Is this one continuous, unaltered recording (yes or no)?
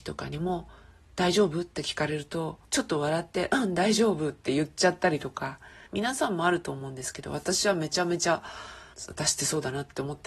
no